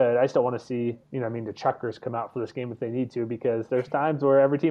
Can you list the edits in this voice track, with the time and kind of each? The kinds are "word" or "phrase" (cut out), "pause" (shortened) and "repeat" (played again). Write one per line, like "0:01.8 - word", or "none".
0:01.0 - pause